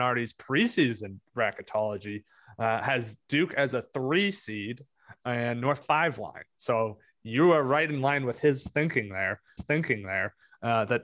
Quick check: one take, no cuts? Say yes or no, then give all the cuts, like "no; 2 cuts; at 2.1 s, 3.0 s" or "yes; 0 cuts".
no; 2 cuts; at 5.8 s, 9.6 s